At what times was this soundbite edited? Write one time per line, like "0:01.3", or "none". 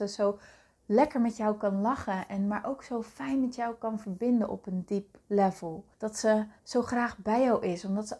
0:05.9
0:06.6